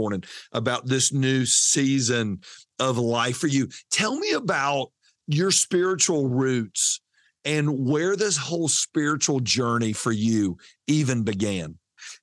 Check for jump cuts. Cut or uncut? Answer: uncut